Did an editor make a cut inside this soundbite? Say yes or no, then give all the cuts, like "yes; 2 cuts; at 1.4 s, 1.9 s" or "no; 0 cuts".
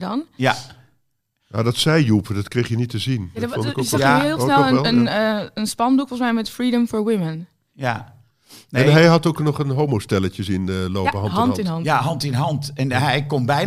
no; 0 cuts